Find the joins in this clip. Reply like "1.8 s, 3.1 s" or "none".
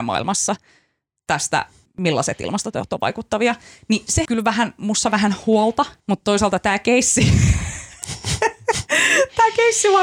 1.8 s, 4.2 s, 6.0 s